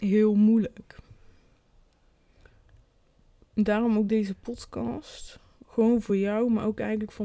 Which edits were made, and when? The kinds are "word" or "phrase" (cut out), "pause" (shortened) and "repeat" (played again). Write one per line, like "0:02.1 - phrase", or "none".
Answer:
none